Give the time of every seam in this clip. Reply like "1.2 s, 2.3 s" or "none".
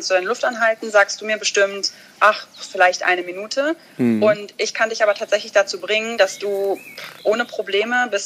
none